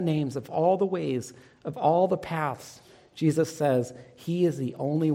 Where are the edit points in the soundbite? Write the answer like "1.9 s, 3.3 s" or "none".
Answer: none